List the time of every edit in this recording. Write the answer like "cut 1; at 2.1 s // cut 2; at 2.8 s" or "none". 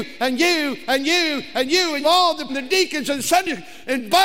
cut 1; at 2.0 s // cut 2; at 2.5 s